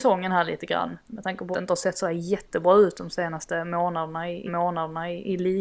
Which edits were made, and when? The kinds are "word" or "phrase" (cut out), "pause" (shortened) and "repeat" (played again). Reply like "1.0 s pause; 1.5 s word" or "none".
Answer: 1.5 s word; 4.5 s repeat